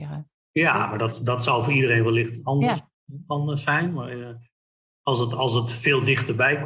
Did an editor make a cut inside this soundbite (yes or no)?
no